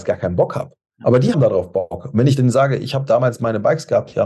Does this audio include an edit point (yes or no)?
yes